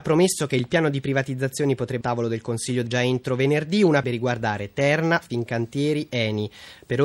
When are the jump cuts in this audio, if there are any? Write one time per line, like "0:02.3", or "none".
0:02.0
0:02.9
0:04.0